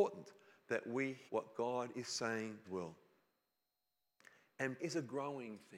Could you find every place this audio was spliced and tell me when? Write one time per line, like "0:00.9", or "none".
0:01.3
0:02.6
0:04.8